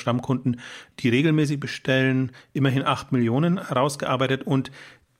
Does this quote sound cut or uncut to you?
uncut